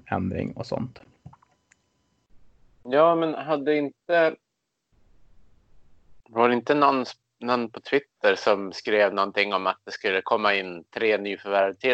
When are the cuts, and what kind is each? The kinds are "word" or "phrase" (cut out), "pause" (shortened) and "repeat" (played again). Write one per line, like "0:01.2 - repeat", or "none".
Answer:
none